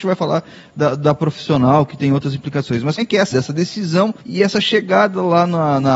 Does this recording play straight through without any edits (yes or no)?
no